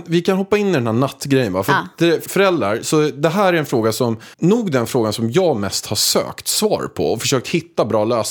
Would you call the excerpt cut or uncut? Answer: cut